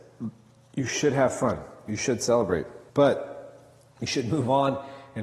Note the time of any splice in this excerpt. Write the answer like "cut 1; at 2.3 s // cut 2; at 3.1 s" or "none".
cut 1; at 2.9 s